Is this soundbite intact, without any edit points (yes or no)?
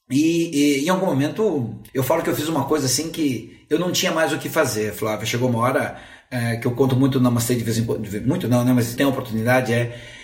no